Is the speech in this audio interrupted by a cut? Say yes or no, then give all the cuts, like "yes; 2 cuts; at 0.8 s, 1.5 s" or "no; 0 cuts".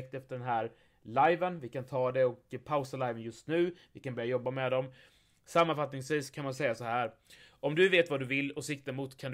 no; 0 cuts